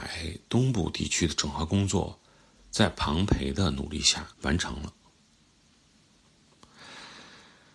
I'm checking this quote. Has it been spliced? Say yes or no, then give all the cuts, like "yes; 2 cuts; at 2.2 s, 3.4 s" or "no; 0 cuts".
yes; 1 cut; at 4.3 s